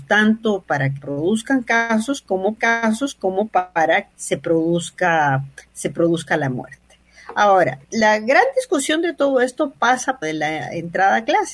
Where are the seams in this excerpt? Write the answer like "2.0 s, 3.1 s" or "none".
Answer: 1.0 s, 2.6 s, 4.1 s, 7.8 s, 10.2 s